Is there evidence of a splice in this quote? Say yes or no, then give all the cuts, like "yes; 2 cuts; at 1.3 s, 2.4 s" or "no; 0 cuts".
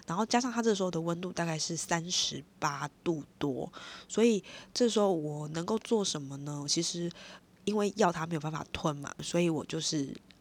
no; 0 cuts